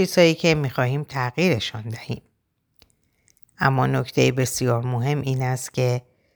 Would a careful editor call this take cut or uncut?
uncut